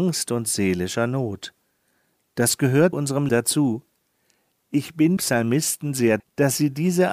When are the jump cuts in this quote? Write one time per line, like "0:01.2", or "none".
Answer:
0:02.9
0:03.3
0:05.2
0:06.2